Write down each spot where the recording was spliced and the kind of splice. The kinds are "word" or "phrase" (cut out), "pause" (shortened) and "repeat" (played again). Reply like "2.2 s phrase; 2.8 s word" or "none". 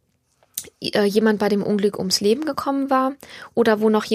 none